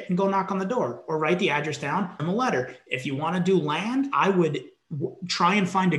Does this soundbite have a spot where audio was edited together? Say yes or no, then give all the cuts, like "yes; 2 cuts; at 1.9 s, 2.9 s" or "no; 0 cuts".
yes; 1 cut; at 2.2 s